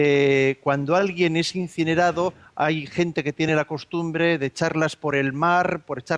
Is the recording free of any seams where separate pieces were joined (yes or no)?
yes